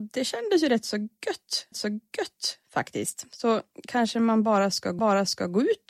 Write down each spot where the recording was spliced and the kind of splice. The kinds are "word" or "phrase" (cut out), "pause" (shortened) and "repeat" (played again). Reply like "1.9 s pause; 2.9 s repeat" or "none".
1.7 s repeat; 5.0 s repeat